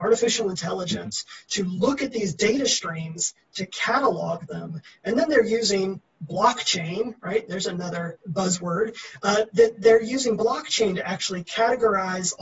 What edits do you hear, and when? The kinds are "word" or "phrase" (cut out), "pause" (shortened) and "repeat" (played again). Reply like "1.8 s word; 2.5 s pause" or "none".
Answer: 8.2 s pause